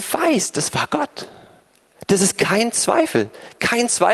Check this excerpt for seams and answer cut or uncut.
uncut